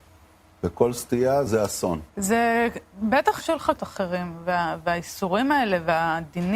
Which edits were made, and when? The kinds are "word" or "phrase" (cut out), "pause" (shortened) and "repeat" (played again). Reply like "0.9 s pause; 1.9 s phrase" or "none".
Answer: 1.5 s word; 2.1 s pause; 3.4 s phrase; 3.8 s phrase